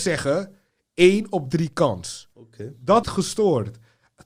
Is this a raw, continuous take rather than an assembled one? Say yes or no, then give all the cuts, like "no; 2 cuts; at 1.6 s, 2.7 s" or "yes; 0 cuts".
no; 2 cuts; at 2.3 s, 3.0 s